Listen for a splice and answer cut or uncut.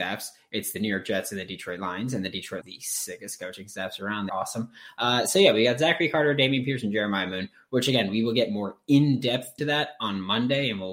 cut